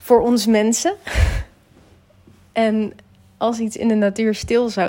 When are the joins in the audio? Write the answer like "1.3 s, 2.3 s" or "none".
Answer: none